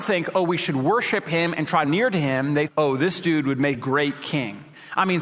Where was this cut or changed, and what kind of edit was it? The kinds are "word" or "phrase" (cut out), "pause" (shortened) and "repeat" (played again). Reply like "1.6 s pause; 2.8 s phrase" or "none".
1.8 s phrase; 2.7 s word; 3.7 s word